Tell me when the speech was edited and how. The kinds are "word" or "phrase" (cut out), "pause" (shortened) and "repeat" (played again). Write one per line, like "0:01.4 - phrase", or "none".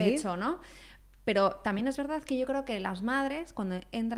none